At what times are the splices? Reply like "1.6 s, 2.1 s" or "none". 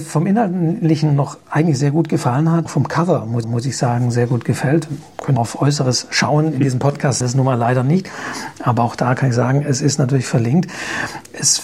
2.7 s, 3.4 s, 5.4 s, 7.2 s